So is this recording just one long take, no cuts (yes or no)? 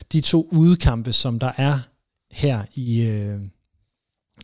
yes